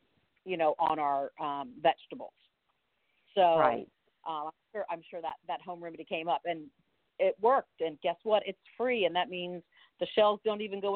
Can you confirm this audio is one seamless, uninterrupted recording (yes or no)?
yes